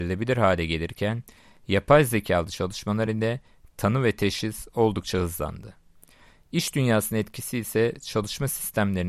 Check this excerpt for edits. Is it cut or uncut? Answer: uncut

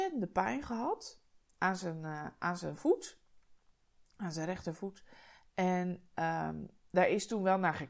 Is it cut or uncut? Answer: uncut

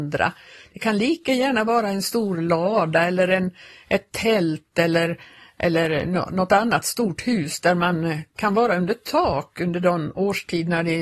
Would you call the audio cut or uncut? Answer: uncut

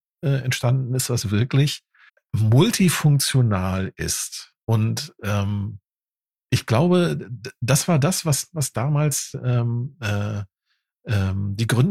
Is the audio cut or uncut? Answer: cut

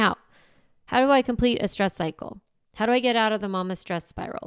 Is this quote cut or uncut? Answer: uncut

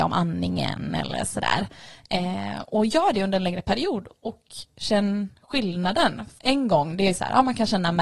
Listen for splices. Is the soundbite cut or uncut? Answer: cut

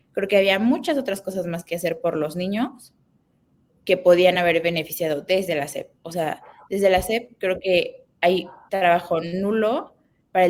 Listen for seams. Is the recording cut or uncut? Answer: uncut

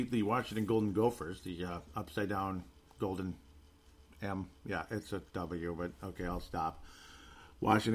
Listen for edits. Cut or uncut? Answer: uncut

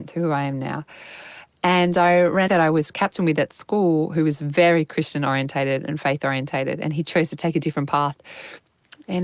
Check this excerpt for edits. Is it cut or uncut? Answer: cut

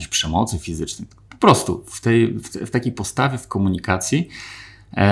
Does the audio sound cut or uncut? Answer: uncut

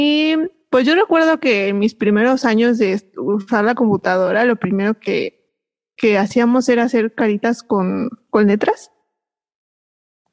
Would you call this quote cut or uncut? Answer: uncut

